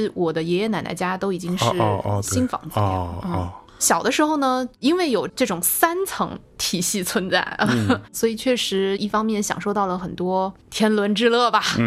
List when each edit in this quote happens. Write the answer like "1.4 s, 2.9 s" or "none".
3.7 s